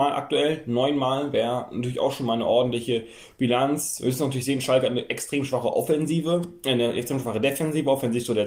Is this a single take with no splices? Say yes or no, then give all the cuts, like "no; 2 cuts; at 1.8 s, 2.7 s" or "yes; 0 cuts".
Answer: yes; 0 cuts